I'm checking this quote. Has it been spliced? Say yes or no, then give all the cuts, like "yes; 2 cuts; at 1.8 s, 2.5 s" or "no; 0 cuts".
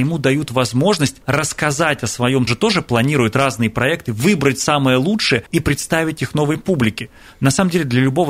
yes; 3 cuts; at 1.2 s, 2.5 s, 5.5 s